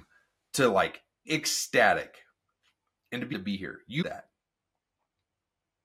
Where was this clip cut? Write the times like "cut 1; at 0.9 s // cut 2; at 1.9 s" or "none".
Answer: cut 1; at 1.2 s // cut 2; at 3.3 s // cut 3; at 4.0 s